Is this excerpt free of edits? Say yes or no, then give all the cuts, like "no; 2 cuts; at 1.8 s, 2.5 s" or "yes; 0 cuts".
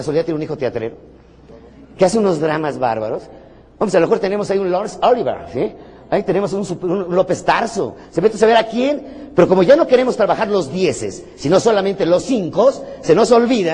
yes; 0 cuts